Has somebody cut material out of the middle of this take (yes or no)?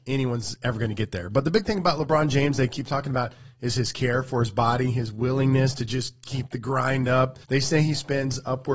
yes